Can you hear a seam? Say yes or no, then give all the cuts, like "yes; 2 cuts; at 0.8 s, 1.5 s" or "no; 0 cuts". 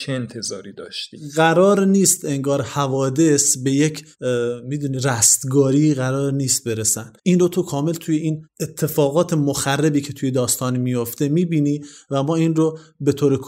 yes; 1 cut; at 7.2 s